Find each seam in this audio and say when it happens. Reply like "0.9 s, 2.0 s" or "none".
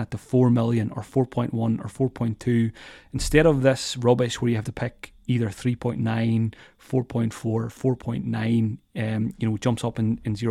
none